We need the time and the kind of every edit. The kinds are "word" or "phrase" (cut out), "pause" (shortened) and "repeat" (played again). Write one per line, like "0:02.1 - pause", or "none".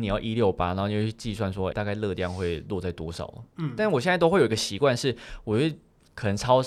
0:01.7 - word